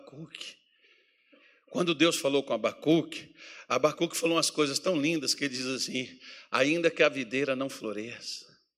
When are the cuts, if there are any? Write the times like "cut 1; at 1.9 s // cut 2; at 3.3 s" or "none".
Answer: none